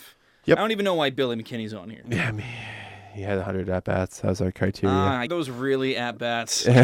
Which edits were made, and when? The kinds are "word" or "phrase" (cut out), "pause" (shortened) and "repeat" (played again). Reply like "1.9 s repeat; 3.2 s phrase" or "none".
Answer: 5.3 s phrase